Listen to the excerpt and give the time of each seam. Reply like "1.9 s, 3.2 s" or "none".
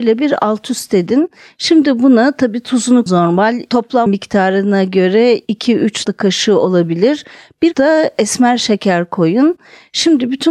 3.1 s, 4.1 s, 6.0 s, 7.7 s